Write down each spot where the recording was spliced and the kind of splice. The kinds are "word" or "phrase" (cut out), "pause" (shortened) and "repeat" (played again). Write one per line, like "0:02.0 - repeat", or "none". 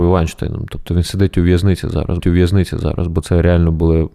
0:02.2 - repeat